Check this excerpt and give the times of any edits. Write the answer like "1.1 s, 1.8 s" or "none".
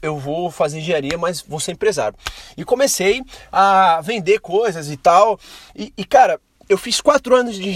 none